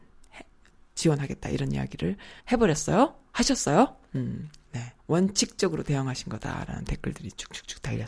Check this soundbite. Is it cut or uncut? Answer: cut